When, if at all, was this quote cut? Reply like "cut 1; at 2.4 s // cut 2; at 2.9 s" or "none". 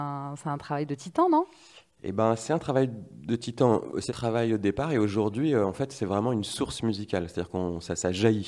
cut 1; at 4.1 s

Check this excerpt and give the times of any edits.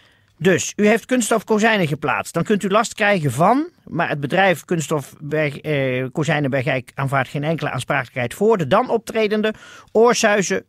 none

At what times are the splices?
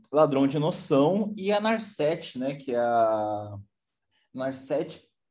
none

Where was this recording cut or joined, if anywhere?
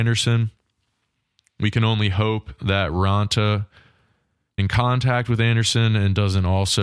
cut 1; at 4.6 s

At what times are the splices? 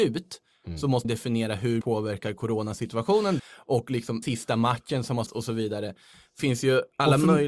cut 1; at 1.0 s // cut 2; at 1.8 s // cut 3; at 3.4 s // cut 4; at 4.2 s // cut 5; at 5.3 s // cut 6; at 6.4 s

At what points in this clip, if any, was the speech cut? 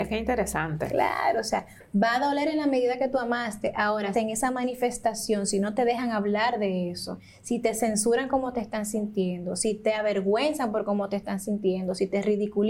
cut 1; at 4.1 s

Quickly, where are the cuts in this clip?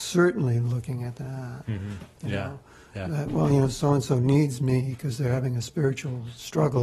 none

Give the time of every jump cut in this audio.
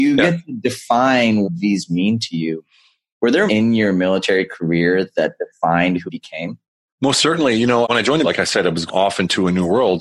cut 1; at 1.4 s // cut 2; at 1.9 s // cut 3; at 3.5 s // cut 4; at 6.1 s // cut 5; at 7.8 s // cut 6; at 8.2 s // cut 7; at 8.9 s

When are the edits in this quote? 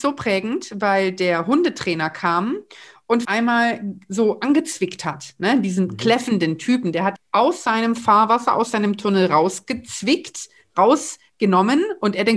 cut 1; at 3.2 s // cut 2; at 7.2 s

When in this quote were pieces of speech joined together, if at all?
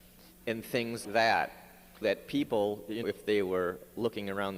cut 1; at 1.0 s // cut 2; at 2.0 s // cut 3; at 3.0 s

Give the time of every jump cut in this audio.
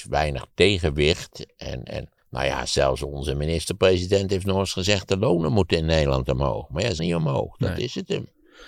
cut 1; at 2.2 s // cut 2; at 7.0 s

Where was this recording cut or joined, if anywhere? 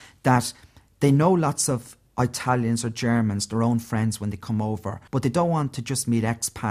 cut 1; at 5.1 s

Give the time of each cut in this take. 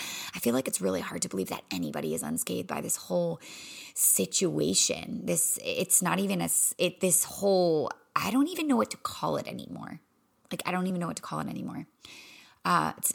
none

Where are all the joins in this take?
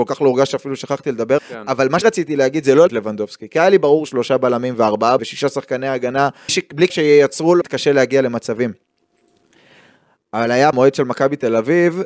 cut 1; at 1.4 s // cut 2; at 2.0 s // cut 3; at 2.9 s // cut 4; at 4.1 s // cut 5; at 5.2 s // cut 6; at 6.5 s // cut 7; at 6.9 s // cut 8; at 7.6 s // cut 9; at 10.7 s

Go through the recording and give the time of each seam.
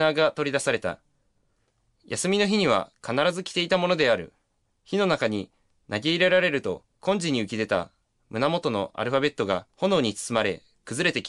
cut 1; at 4.7 s // cut 2; at 6.9 s // cut 3; at 9.7 s

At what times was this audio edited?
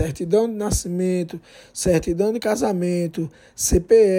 none

